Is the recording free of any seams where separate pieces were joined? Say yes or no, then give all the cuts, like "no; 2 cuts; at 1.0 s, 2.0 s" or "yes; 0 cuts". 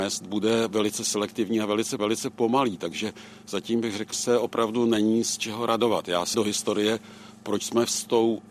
no; 3 cuts; at 2.0 s, 4.1 s, 6.3 s